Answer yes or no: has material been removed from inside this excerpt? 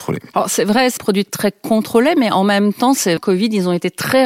yes